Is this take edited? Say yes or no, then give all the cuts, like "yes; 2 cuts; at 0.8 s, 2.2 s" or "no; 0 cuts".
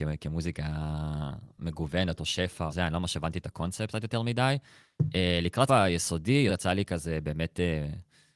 yes; 3 cuts; at 2.7 s, 5.7 s, 6.5 s